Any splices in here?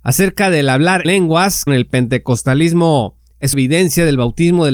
yes; 3 cuts; at 1.0 s, 1.7 s, 3.5 s

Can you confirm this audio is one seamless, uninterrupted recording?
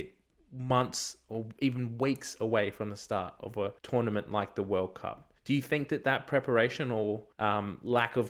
no; 3 cuts; at 3.8 s, 5.4 s, 7.3 s

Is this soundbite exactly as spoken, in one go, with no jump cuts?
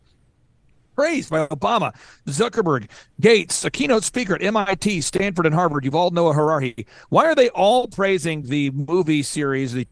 yes; 0 cuts

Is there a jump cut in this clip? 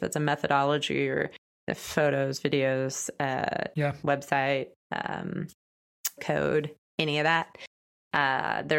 yes; 3 cuts; at 1.7 s, 3.7 s, 6.2 s

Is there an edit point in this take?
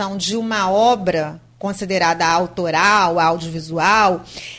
no; 0 cuts

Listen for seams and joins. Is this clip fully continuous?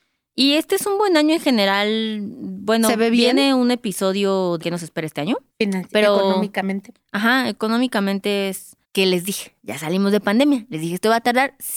no; 4 cuts; at 4.6 s, 5.5 s, 8.8 s, 9.6 s

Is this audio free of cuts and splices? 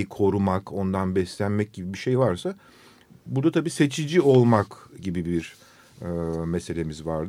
yes; 0 cuts

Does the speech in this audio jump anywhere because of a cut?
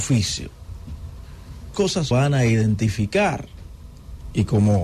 yes; 2 cuts; at 1.7 s, 2.1 s

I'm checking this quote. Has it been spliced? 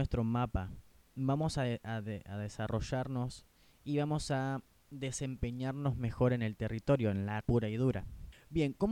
yes; 2 cuts; at 0.9 s, 7.4 s

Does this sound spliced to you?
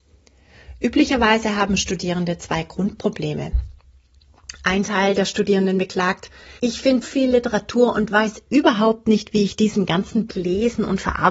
yes; 3 cuts; at 6.6 s, 7.0 s, 10.3 s

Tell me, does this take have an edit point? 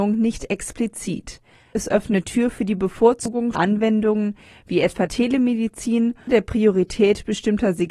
yes; 5 cuts; at 1.7 s, 2.2 s, 3.5 s, 5.1 s, 6.3 s

